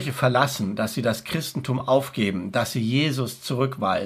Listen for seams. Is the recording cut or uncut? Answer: uncut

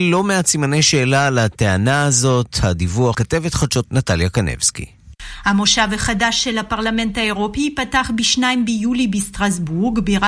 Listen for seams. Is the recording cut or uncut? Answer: cut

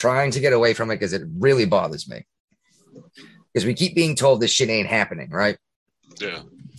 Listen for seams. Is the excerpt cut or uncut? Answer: uncut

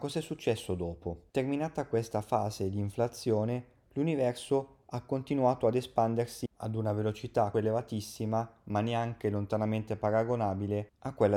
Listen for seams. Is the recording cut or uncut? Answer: cut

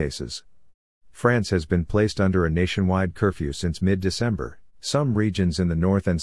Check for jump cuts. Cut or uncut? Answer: cut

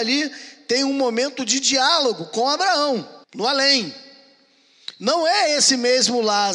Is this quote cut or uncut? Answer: cut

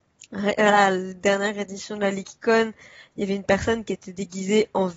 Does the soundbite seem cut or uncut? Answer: uncut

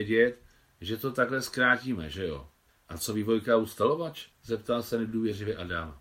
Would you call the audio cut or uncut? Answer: cut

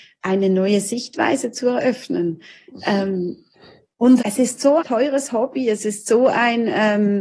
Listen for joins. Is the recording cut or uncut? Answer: cut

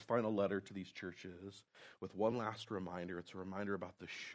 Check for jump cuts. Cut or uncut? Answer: uncut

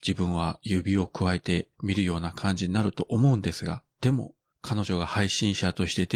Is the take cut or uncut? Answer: cut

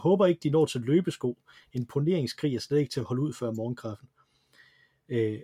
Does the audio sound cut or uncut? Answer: uncut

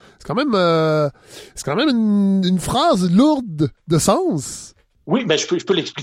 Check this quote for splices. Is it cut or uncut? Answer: uncut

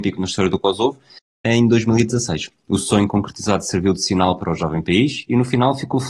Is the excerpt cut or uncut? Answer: uncut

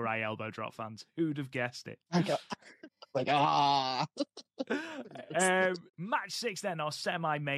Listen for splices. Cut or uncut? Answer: cut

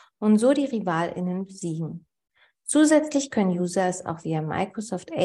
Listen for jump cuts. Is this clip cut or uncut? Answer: uncut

